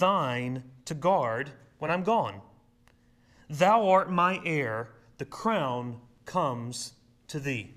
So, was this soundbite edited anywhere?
no; 0 cuts

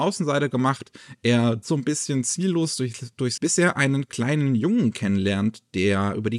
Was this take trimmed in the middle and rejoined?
yes; 2 cuts; at 1.6 s, 3.4 s

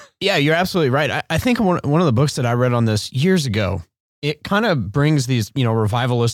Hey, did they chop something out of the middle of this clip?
no; 0 cuts

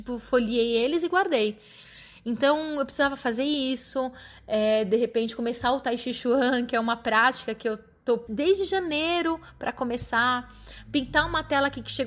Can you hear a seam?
yes; 1 cut; at 8.3 s

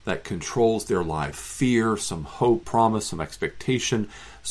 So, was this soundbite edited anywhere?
yes; 2 cuts; at 1.3 s, 2.6 s

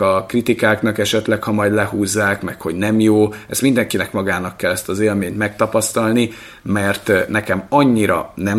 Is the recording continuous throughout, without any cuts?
yes; 0 cuts

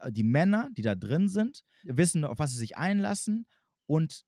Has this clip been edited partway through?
yes; 1 cut; at 1.8 s

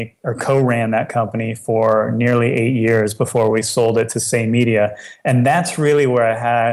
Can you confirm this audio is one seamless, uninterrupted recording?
yes; 0 cuts

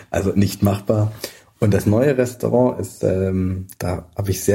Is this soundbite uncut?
yes; 0 cuts

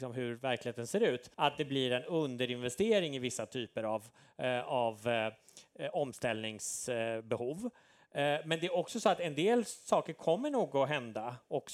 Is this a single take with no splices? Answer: no; 1 cut; at 1.3 s

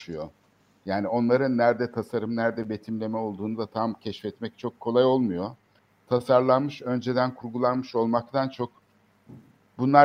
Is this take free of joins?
yes; 0 cuts

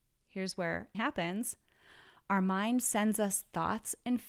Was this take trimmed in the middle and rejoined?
yes; 1 cut; at 0.9 s

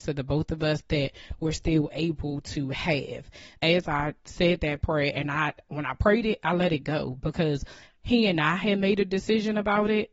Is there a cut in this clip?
no; 0 cuts

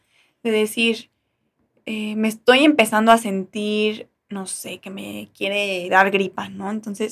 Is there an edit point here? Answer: no; 0 cuts

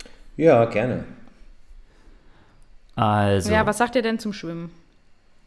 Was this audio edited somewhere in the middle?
no; 0 cuts

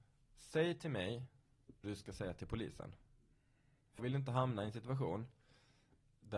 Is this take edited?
yes; 2 cuts; at 1.8 s, 4.0 s

